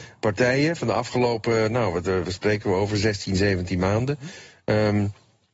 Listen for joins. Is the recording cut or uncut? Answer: uncut